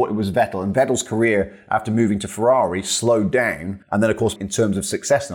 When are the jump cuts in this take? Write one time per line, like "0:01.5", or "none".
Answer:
0:03.8
0:04.4